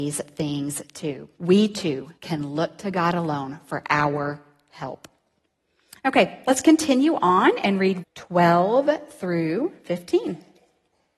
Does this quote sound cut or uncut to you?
cut